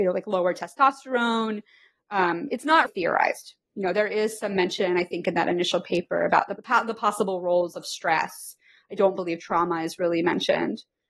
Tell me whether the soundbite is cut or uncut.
cut